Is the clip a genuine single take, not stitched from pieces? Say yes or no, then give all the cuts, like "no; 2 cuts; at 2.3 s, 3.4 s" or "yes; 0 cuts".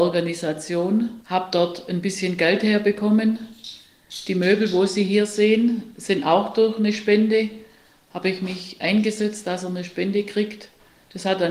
yes; 0 cuts